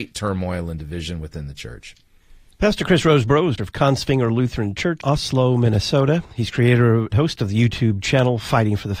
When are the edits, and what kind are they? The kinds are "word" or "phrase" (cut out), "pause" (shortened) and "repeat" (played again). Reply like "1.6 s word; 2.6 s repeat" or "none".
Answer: 3.6 s word; 5.0 s word; 7.1 s word